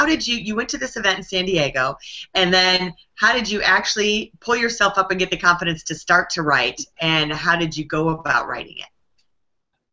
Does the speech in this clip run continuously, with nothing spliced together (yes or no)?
yes